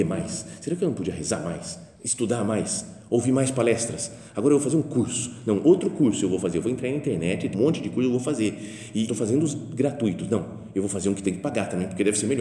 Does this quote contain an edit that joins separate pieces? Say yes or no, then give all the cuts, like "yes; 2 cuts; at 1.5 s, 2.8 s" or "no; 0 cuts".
yes; 3 cuts; at 1.9 s, 7.5 s, 9.1 s